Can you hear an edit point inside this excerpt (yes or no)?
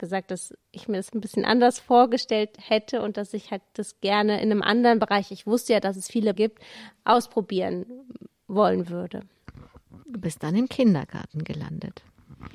yes